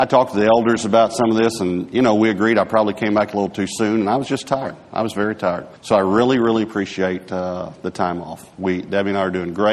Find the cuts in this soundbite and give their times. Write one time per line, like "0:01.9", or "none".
0:05.8

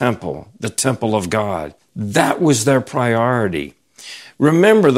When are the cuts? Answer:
0:01.8

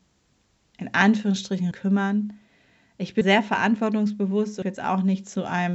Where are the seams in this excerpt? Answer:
0:01.7
0:03.2
0:04.6

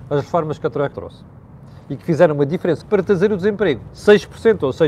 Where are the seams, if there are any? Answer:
0:00.9
0:02.8
0:03.9

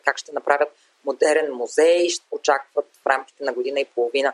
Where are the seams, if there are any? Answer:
none

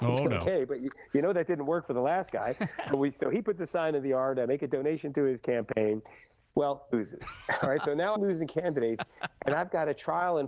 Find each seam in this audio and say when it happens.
0:06.9
0:08.2

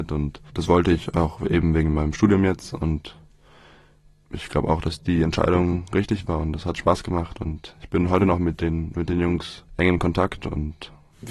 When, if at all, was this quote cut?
none

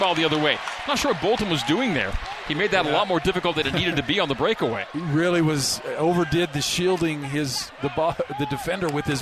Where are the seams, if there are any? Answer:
none

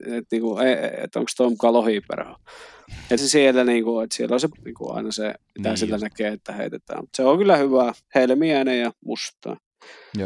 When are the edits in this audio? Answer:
0:03.2
0:04.5
0:08.0

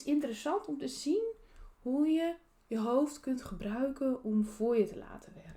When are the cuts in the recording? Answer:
none

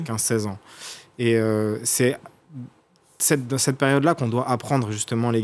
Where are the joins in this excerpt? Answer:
none

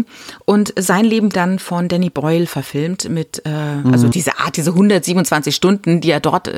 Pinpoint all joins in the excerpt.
0:01.3
0:04.1

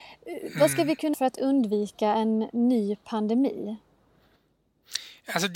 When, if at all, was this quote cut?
0:01.1

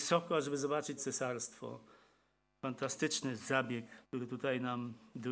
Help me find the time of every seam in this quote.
0:01.0
0:04.0

